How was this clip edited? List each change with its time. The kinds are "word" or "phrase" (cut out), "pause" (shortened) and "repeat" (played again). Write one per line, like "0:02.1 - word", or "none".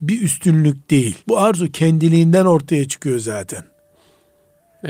0:01.2 - pause